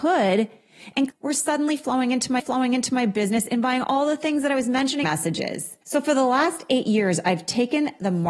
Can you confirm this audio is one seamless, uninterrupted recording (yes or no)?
no